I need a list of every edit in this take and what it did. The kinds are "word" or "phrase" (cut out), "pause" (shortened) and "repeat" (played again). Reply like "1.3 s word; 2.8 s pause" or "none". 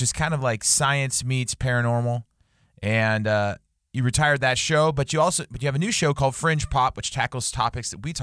none